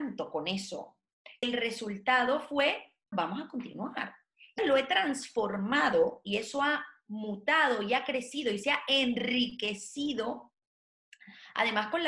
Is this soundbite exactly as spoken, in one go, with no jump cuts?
no; 3 cuts; at 1.4 s, 3.1 s, 4.6 s

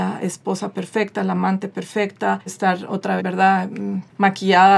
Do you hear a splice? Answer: yes; 2 cuts; at 2.5 s, 3.2 s

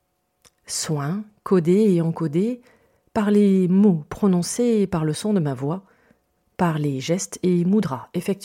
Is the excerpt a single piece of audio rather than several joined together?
yes; 0 cuts

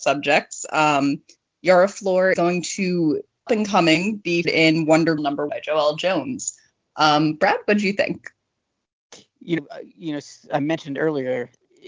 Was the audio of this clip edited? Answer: yes; 6 cuts; at 2.3 s, 3.5 s, 4.4 s, 5.2 s, 5.5 s, 9.6 s

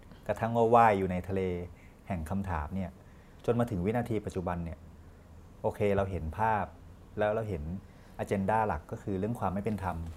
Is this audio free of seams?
yes; 0 cuts

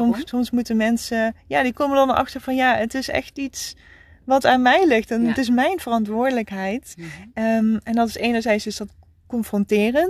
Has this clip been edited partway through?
no; 0 cuts

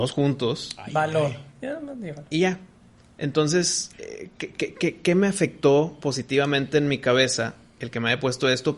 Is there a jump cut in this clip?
yes; 1 cut; at 3.9 s

